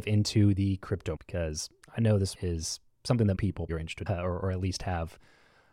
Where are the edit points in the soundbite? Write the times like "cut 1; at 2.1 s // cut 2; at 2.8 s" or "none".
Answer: cut 1; at 1.1 s // cut 2; at 2.3 s // cut 3; at 3.3 s // cut 4; at 3.7 s // cut 5; at 4.1 s